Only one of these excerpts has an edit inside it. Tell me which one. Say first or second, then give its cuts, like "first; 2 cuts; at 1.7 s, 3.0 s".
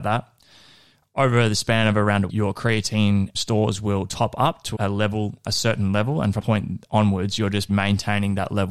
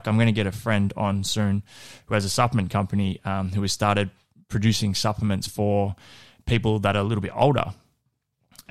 first; 6 cuts; at 2.3 s, 3.3 s, 4.7 s, 5.4 s, 6.4 s, 7.7 s